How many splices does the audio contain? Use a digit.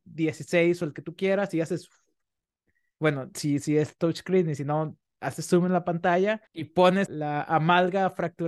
1